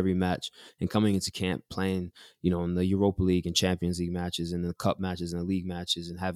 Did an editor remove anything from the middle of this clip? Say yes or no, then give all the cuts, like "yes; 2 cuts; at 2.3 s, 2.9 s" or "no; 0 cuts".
no; 0 cuts